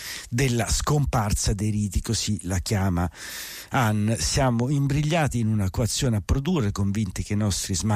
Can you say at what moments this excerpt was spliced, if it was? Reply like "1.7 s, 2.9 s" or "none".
none